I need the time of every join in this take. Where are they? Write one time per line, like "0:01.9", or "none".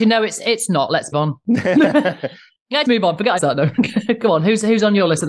0:01.1
0:02.8
0:03.4